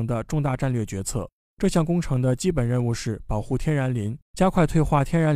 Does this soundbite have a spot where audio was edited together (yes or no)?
yes